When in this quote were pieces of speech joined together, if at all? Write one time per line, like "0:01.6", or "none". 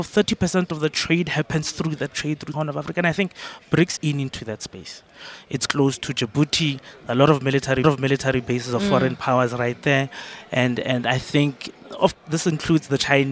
0:02.5
0:04.0
0:05.7
0:07.8
0:12.1

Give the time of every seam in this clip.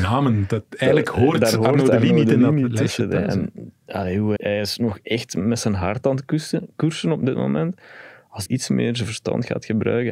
0:04.4
0:08.5

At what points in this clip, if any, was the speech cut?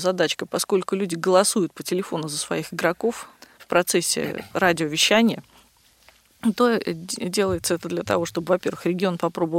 0:03.4

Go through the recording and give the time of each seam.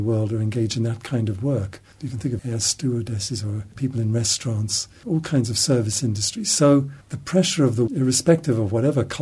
0:02.4
0:03.7
0:07.9

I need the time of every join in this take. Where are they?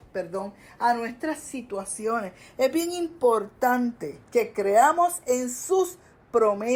0:04.2

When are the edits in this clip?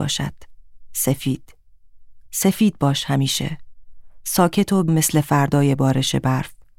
0:02.3
0:04.9

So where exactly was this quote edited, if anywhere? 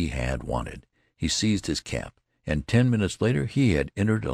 none

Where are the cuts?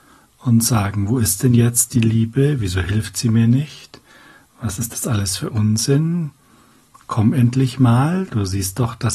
none

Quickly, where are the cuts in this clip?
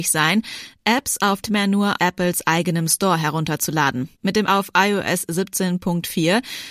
0:01.4
0:02.0
0:04.1
0:04.5

